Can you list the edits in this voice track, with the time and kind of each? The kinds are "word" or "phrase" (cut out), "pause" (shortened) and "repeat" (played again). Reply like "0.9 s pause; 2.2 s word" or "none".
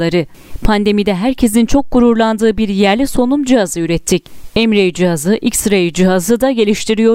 none